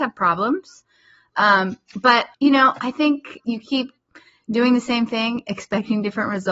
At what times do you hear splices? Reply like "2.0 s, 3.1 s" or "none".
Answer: 2.3 s, 3.4 s